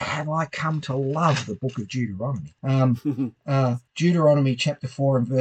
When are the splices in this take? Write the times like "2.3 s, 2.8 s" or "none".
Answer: 2.6 s, 3.9 s